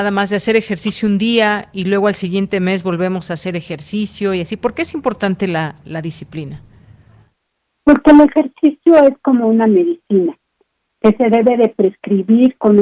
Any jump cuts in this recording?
no; 0 cuts

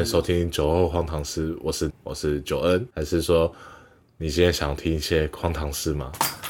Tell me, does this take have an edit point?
yes; 2 cuts; at 1.9 s, 2.9 s

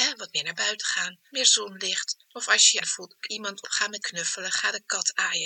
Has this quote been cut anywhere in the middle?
yes; 6 cuts; at 1.3 s, 2.2 s, 2.8 s, 3.2 s, 3.6 s, 4.0 s

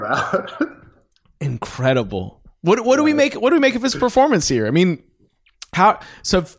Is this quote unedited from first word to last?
yes; 0 cuts

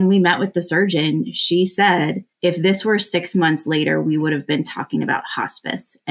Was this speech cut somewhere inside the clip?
yes; 1 cut; at 2.3 s

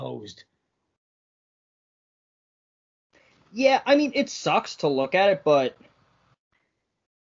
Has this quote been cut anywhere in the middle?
no; 0 cuts

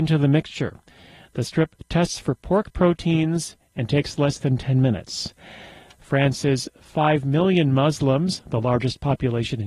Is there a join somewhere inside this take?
no; 0 cuts

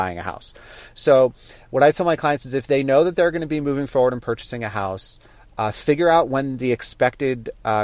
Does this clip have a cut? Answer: no; 0 cuts

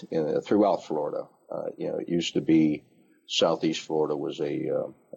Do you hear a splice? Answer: no; 0 cuts

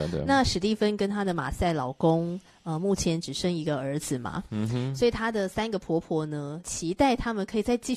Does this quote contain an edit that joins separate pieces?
no; 0 cuts

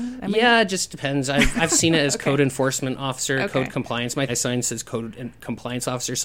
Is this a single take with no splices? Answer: no; 1 cut; at 4.3 s

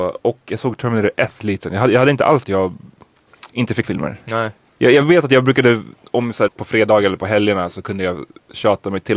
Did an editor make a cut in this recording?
yes; 6 cuts; at 1.4 s, 2.4 s, 3.5 s, 3.8 s, 4.6 s, 6.5 s

